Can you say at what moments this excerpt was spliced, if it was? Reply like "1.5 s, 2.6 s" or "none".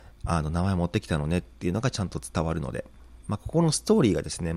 3.2 s